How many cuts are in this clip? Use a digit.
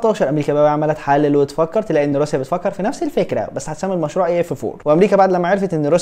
0